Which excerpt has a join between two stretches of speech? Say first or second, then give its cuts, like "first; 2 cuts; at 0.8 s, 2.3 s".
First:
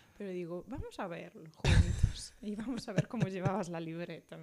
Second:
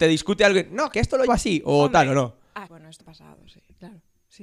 second; 4 cuts; at 0.9 s, 1.3 s, 2.7 s, 3.0 s